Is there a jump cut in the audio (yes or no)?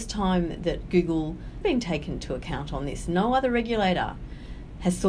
yes